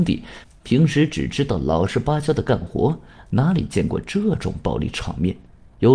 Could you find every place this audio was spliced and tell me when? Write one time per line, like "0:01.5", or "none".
none